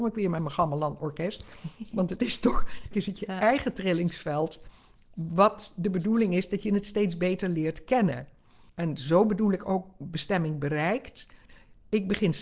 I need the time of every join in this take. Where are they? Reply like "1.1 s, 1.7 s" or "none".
2.9 s, 8.7 s

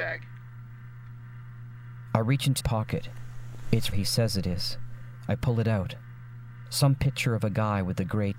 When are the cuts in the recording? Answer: 2.6 s, 3.9 s

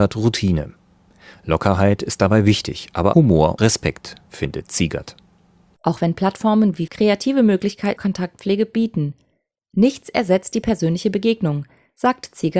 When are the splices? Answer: 3.1 s, 3.6 s, 6.9 s, 8.0 s

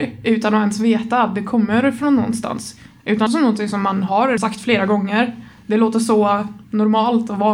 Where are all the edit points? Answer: 3.3 s, 4.4 s, 6.6 s

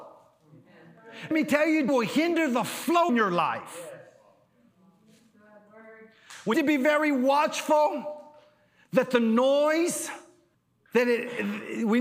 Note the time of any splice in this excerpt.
1.3 s, 1.9 s, 3.1 s, 6.5 s, 10.5 s

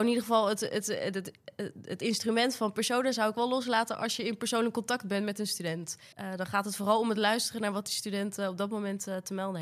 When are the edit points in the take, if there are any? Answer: 6.1 s

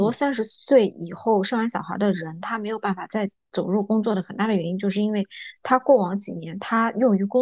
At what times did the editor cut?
none

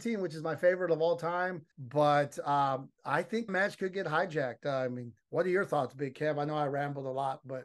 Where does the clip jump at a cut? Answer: 1.7 s, 2.9 s, 3.5 s, 5.2 s

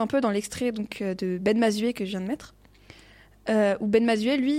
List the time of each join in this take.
none

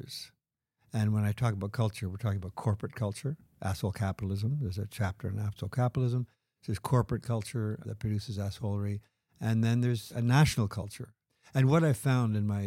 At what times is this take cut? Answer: none

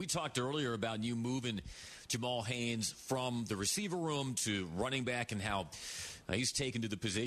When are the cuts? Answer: none

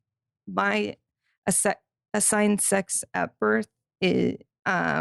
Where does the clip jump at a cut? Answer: none

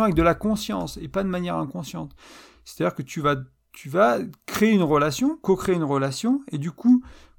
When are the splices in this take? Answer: none

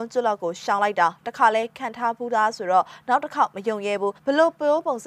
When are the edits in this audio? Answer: 4.2 s

